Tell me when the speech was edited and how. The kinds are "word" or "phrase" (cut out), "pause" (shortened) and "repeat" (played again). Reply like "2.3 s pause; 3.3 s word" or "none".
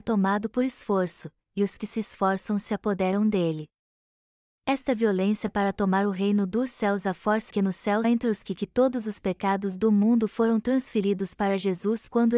7.5 s word; 8.0 s word; 8.5 s word